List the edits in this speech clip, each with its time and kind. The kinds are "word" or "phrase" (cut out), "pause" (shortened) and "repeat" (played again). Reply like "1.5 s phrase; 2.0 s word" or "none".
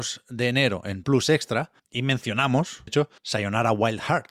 1.0 s word; 1.8 s pause; 2.9 s phrase; 3.2 s pause